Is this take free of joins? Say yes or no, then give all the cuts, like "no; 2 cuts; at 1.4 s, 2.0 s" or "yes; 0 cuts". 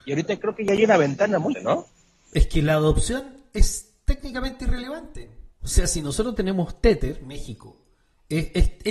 no; 2 cuts; at 1.5 s, 5.5 s